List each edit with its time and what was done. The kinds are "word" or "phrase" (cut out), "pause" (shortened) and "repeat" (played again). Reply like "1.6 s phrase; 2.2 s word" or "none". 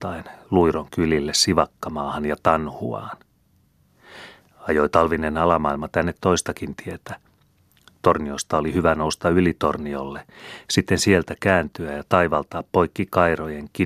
none